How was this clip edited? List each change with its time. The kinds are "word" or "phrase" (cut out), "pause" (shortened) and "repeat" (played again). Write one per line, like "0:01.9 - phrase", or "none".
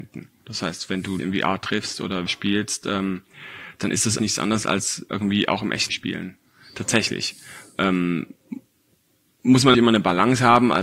0:01.2 - word
0:02.3 - word
0:04.2 - word
0:05.9 - word
0:09.7 - word